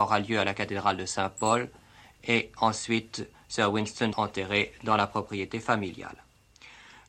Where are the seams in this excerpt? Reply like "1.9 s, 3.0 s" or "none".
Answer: 4.1 s

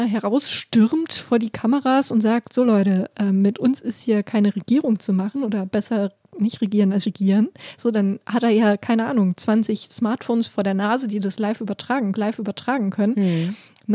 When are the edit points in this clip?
7.0 s, 12.1 s

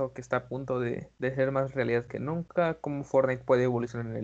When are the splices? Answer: 1.1 s

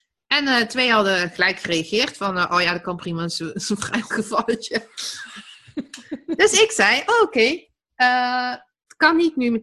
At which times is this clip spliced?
4.1 s

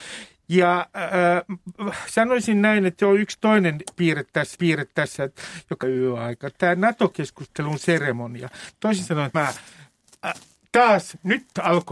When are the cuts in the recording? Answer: 4.5 s, 5.8 s, 9.3 s

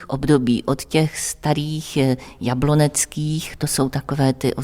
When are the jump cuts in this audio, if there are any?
none

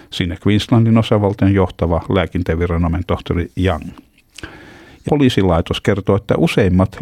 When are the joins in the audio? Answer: 3.5 s, 5.1 s

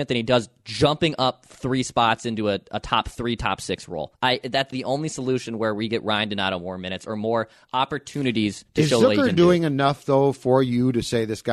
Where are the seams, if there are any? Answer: 4.1 s, 4.7 s

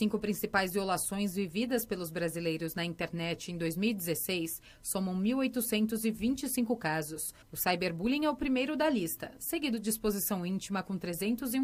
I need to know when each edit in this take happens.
7.4 s

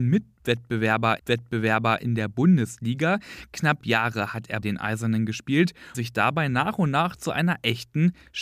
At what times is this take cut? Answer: 1.2 s, 3.8 s, 4.6 s, 5.9 s

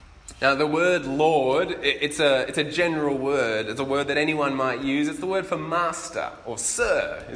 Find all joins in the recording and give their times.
none

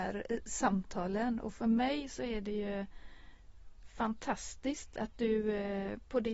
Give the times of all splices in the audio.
none

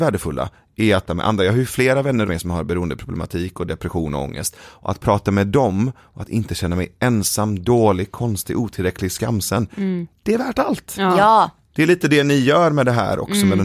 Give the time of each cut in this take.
1.1 s, 2.2 s

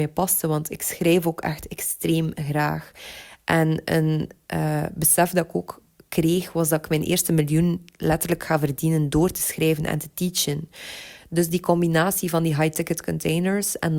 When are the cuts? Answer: none

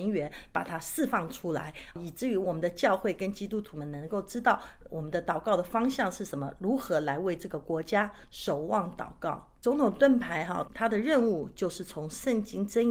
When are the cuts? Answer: 10.7 s

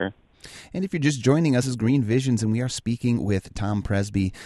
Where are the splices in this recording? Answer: 1.6 s

